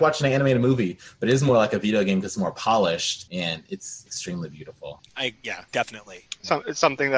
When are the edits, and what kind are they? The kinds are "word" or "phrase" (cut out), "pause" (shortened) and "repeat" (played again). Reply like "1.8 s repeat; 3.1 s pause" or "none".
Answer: none